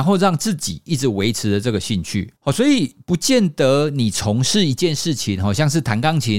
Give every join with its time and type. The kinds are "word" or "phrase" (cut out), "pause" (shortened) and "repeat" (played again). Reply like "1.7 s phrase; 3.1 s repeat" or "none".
2.4 s pause